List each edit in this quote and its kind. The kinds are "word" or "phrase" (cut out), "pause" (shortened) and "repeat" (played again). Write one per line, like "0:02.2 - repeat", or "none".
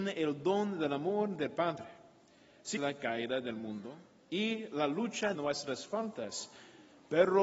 0:02.8 - word
0:05.3 - word

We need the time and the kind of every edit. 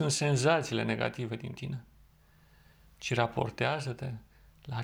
none

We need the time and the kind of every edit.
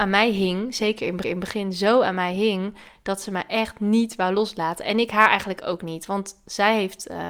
0:01.2 - repeat

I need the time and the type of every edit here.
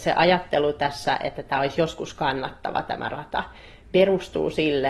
none

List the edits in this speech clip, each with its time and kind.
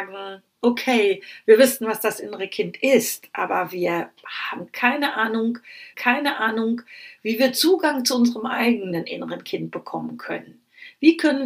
0:05.9 - repeat

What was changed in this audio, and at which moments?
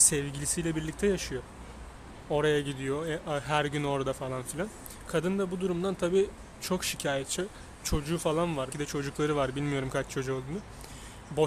0:08.7 - word

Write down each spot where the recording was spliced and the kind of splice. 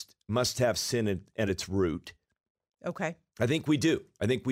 none

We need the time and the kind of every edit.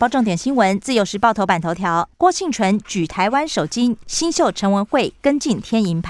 0:02.1 - pause

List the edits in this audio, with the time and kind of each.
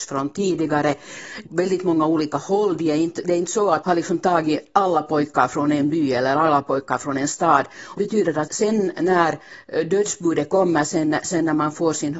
0:01.5 - phrase
0:03.8 - phrase
0:08.0 - word
0:08.5 - word

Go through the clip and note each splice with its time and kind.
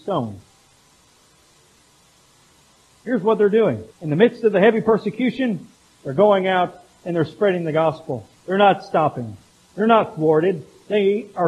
0:03.9 - pause
0:05.7 - pause
0:08.4 - pause

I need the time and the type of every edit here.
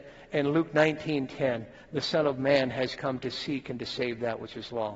none

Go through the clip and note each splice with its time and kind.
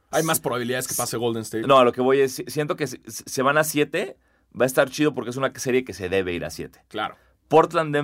none

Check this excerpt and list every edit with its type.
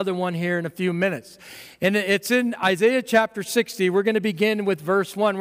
none

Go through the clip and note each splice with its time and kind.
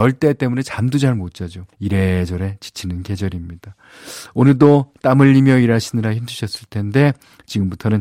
0:01.7 - pause

